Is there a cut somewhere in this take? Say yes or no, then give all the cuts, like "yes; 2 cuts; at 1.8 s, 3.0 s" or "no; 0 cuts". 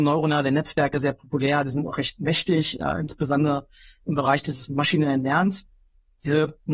no; 0 cuts